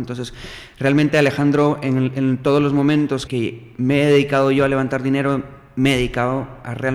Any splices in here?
yes; 1 cut; at 3.3 s

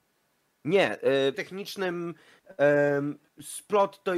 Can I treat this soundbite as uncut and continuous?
no; 2 cuts; at 1.3 s, 3.3 s

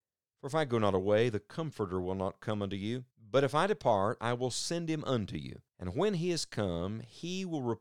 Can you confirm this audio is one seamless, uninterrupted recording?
no; 2 cuts; at 3.1 s, 5.7 s

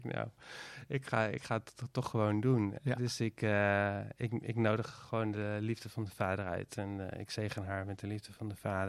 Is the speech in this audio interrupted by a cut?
no; 0 cuts

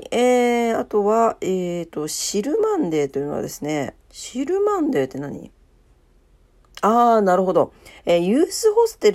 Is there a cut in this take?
yes; 2 cuts; at 4.0 s, 8.0 s

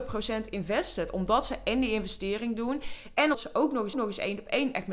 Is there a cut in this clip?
yes; 2 cuts; at 3.3 s, 3.9 s

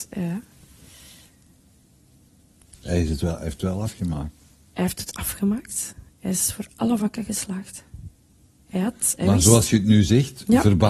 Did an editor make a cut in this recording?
no; 0 cuts

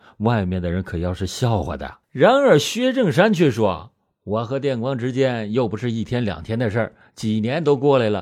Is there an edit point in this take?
yes; 1 cut; at 2.0 s

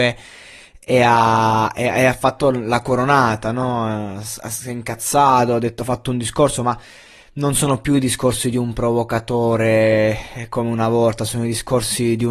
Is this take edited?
no; 0 cuts

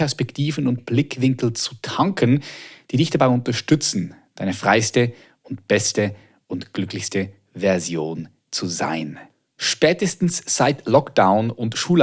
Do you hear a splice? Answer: no; 0 cuts

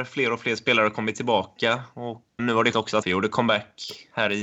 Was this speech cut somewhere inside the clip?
yes; 3 cuts; at 2.4 s, 2.7 s, 3.0 s

